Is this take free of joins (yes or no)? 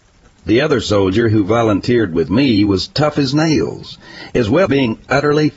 no